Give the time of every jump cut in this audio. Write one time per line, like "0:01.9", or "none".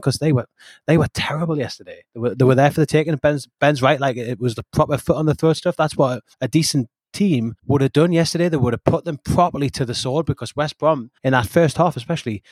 0:02.1
0:06.3
0:07.6
0:11.2